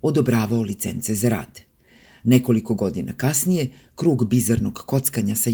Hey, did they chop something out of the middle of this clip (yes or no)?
no